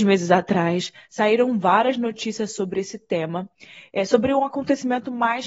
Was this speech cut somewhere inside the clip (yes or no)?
no